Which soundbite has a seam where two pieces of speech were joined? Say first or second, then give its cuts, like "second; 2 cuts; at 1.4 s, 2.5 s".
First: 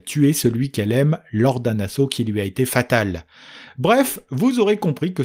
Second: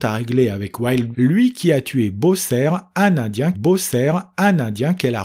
second; 2 cuts; at 1.1 s, 3.5 s